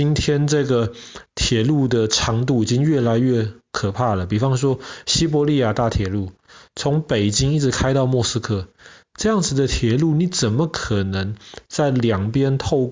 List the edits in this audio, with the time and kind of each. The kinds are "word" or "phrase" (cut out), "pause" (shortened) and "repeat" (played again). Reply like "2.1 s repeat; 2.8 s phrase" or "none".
none